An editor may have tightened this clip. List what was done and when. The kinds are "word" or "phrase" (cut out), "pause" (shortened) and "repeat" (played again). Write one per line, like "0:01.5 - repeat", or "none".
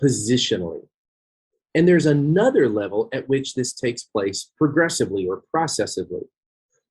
none